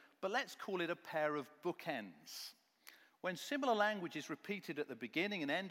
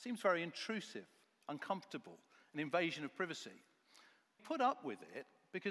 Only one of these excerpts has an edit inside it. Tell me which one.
second; 1 cut; at 4.4 s

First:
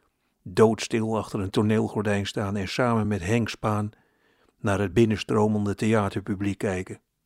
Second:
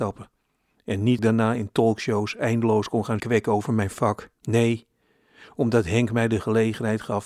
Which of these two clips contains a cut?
second; 3 cuts; at 1.2 s, 3.2 s, 4.4 s

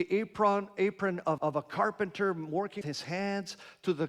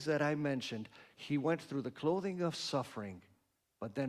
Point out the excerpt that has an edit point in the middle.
first; 2 cuts; at 1.4 s, 2.8 s

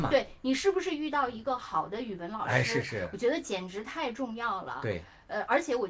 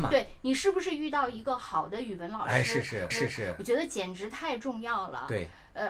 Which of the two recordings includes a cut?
second; 1 cut; at 3.1 s

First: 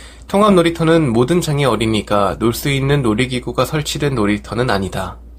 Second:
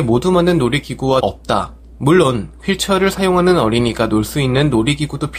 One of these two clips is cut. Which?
second; 1 cut; at 1.2 s

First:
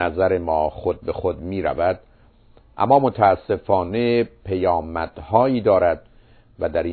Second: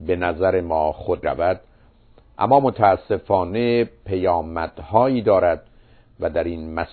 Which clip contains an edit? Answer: second; 1 cut; at 1.2 s

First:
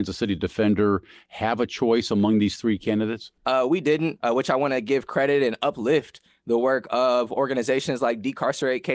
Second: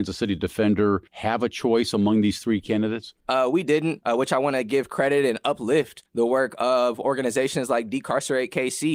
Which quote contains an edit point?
second; 2 cuts; at 1.1 s, 6.1 s

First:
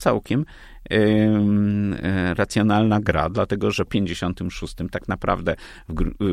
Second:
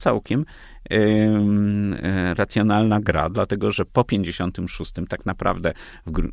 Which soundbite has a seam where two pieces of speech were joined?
first; 1 cut; at 3.9 s

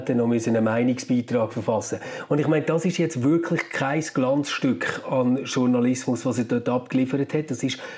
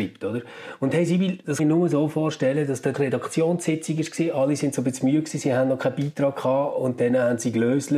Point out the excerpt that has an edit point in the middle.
second; 2 cuts; at 1.6 s, 2.9 s

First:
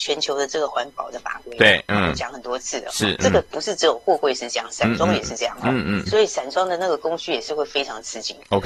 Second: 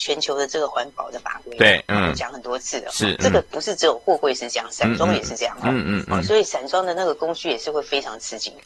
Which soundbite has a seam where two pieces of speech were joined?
first; 1 cut; at 6.1 s

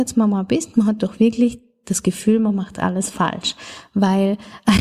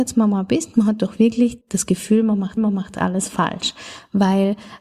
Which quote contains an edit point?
second; 2 cuts; at 1.6 s, 2.6 s

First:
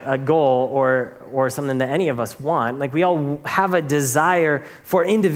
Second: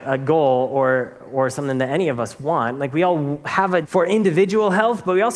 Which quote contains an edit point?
second; 1 cut; at 3.8 s

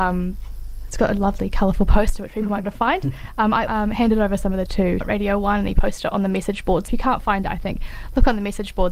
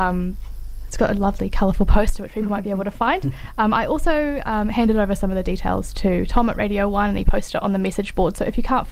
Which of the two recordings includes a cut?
first; 5 cuts; at 2.6 s, 3.7 s, 4.7 s, 5.0 s, 6.9 s

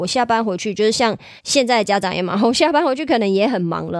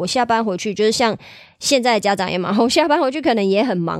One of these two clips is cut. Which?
first; 1 cut; at 1.4 s

